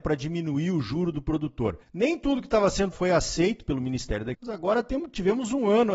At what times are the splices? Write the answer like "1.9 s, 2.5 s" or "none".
1.8 s, 2.9 s, 4.3 s